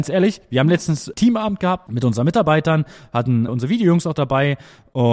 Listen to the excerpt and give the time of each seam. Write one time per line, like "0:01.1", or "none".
0:03.5